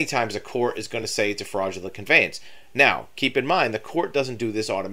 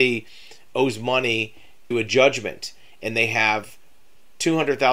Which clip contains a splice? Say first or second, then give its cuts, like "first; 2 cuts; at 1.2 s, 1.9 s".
second; 1 cut; at 1.9 s